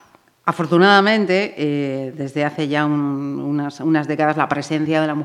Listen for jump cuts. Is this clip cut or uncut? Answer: uncut